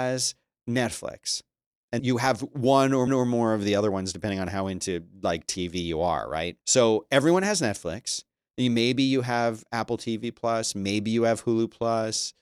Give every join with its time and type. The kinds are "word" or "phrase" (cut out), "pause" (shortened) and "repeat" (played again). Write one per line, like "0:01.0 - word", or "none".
0:02.0 - word
0:03.1 - repeat
0:06.6 - pause